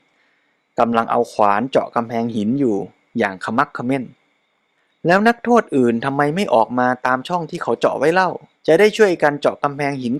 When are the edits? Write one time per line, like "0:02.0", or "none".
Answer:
0:04.8
0:08.5